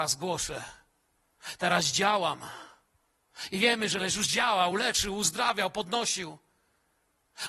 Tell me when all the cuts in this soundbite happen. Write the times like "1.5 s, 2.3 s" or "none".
none